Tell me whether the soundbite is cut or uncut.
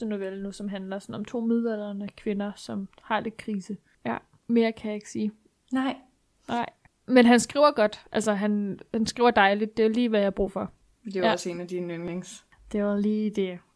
uncut